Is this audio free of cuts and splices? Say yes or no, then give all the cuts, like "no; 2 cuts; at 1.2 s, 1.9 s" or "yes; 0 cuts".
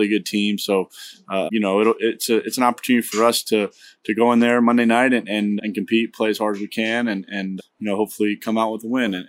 no; 3 cuts; at 1.5 s, 5.6 s, 7.6 s